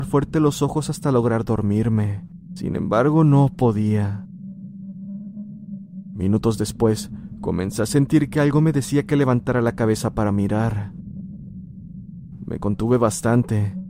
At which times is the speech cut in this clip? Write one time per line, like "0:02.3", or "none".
none